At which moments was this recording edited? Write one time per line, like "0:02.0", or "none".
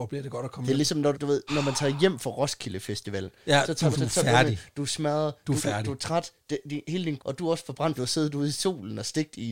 0:01.1
0:01.5
0:03.9
0:05.6
0:07.2
0:08.0